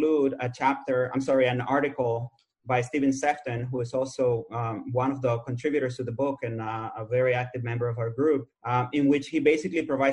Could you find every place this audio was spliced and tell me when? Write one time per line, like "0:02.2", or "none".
0:08.6